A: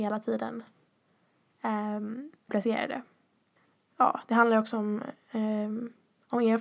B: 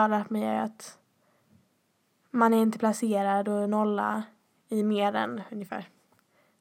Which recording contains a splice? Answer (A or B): A